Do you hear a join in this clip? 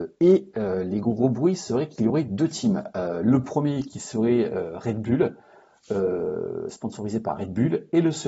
no; 0 cuts

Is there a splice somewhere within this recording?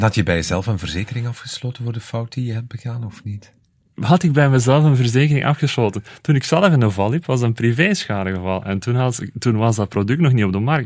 no; 0 cuts

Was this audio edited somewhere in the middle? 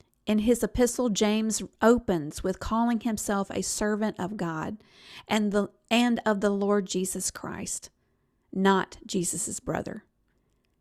no; 0 cuts

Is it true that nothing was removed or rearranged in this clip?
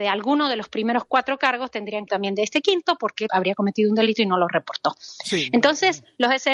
no; 2 cuts; at 2.1 s, 3.3 s

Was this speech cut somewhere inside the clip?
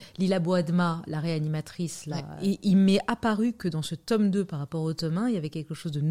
no; 0 cuts

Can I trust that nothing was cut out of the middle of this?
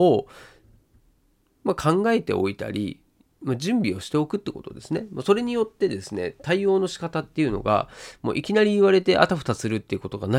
yes; 0 cuts

